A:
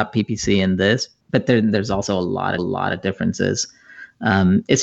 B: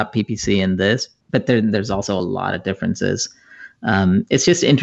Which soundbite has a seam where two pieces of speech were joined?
A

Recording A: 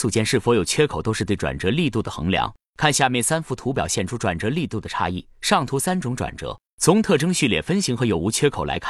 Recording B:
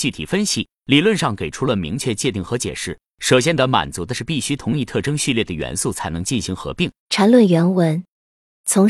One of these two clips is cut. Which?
B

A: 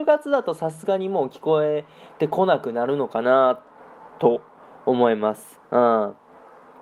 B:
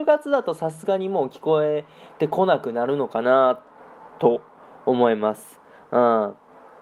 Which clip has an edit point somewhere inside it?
A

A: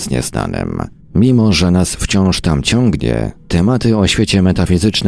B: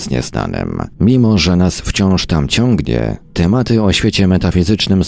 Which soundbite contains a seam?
B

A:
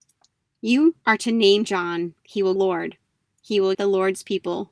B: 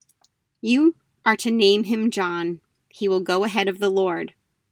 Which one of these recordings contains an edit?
A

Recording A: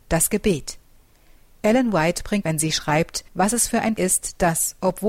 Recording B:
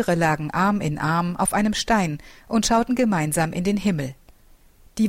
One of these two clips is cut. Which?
A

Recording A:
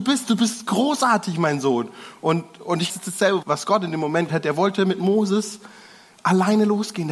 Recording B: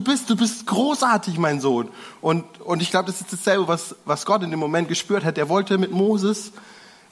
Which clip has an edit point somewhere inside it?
A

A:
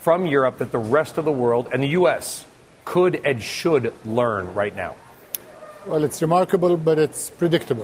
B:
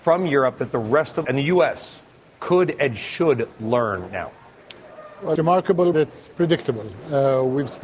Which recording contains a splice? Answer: B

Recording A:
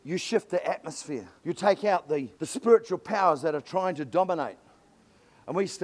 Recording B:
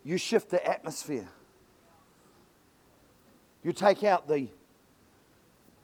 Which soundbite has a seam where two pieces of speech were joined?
A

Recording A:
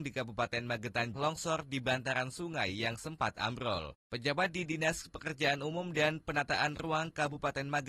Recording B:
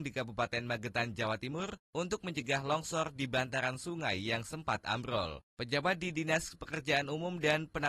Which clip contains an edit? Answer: A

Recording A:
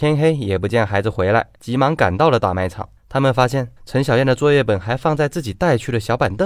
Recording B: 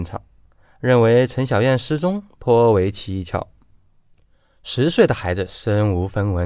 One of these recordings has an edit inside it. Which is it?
A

